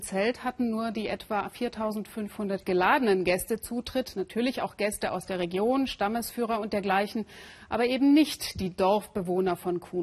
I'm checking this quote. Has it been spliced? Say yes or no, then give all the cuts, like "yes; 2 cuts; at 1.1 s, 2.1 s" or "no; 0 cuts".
no; 0 cuts